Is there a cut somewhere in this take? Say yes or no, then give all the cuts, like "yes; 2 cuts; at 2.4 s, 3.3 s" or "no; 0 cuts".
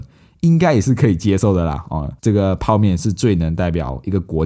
yes; 1 cut; at 2.2 s